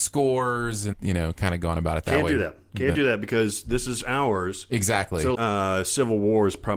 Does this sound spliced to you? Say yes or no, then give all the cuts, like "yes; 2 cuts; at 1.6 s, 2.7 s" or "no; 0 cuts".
yes; 2 cuts; at 0.9 s, 5.3 s